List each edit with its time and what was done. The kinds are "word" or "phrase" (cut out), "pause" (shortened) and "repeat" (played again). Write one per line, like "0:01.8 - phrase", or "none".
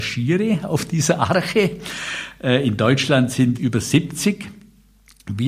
0:03.5 - word